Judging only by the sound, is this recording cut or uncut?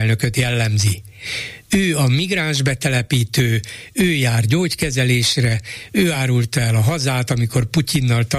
uncut